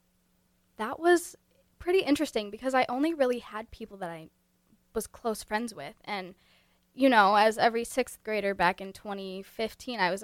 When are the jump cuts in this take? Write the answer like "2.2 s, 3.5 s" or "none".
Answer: none